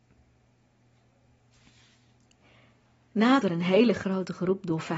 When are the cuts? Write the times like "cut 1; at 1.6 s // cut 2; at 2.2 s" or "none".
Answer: cut 1; at 3.4 s